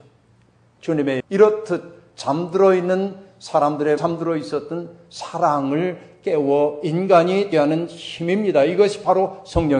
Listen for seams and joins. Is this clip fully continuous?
no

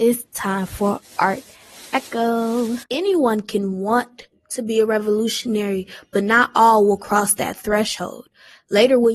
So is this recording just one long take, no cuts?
no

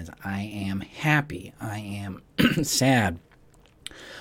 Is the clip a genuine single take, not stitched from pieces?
yes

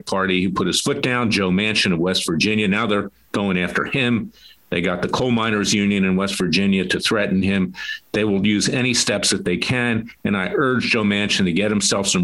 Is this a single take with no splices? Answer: yes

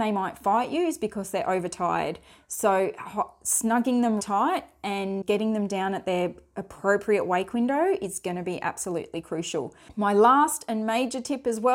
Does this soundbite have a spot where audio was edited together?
yes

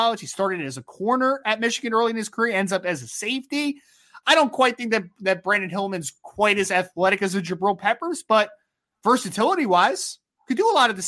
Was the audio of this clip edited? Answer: no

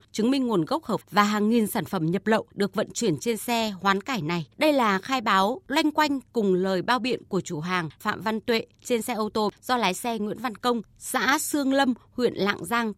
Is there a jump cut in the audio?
yes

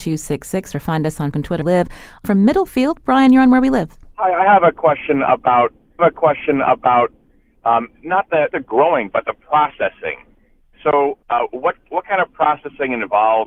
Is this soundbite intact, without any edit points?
no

